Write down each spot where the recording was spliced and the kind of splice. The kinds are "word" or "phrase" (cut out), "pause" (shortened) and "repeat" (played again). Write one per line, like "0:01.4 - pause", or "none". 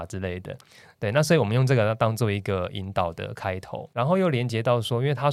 0:03.9 - word